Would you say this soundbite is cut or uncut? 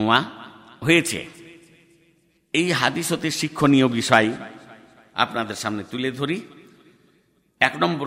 uncut